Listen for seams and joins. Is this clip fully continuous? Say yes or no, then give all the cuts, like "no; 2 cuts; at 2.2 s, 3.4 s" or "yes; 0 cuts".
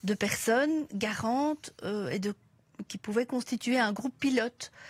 yes; 0 cuts